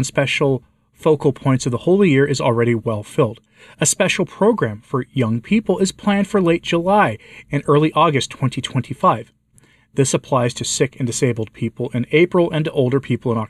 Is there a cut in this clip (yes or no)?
no